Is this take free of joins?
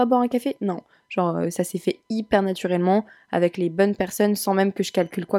yes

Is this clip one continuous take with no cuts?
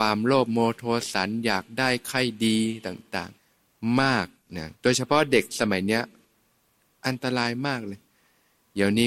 no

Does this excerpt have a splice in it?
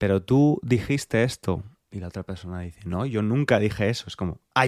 no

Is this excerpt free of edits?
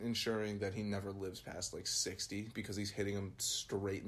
yes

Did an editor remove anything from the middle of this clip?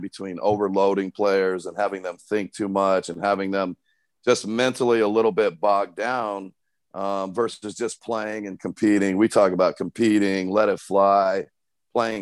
no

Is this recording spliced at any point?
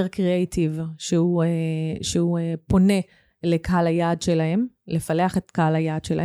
no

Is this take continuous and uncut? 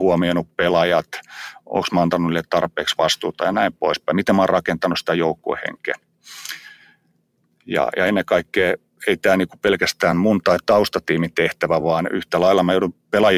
yes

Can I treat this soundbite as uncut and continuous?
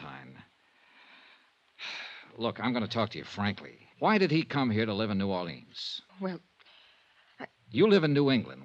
no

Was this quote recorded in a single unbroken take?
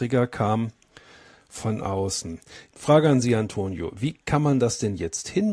yes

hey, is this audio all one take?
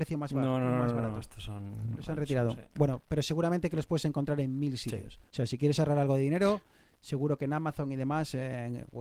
no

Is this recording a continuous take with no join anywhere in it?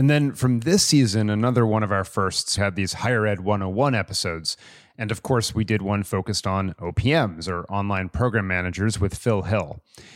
no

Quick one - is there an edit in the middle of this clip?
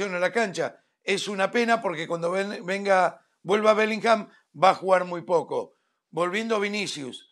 no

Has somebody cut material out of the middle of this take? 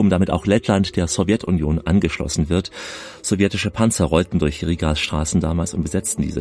no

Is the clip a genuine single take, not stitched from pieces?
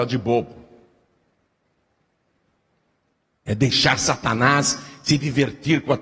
yes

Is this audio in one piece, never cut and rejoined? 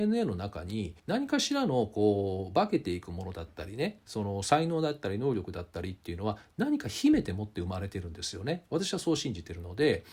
no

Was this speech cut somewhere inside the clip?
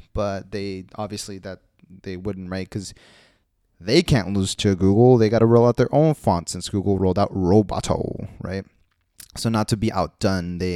no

